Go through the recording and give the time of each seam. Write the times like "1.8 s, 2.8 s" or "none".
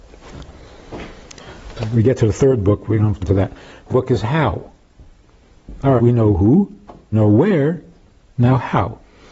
3.2 s, 3.9 s, 6.0 s, 7.1 s